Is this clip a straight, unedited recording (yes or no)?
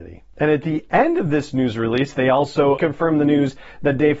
no